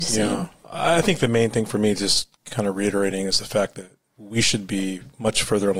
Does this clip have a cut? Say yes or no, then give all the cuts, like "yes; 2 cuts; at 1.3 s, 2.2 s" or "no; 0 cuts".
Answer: yes; 2 cuts; at 2.4 s, 4.0 s